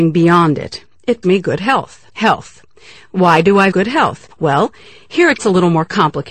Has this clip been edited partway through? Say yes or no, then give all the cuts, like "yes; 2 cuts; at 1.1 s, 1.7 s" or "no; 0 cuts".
yes; 5 cuts; at 1.2 s, 2.1 s, 3.7 s, 4.3 s, 5.4 s